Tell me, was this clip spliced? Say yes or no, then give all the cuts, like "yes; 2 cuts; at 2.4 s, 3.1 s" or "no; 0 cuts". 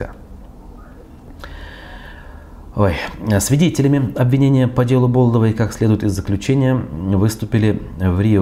no; 0 cuts